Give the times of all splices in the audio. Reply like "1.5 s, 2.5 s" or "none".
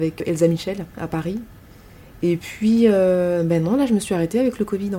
0.9 s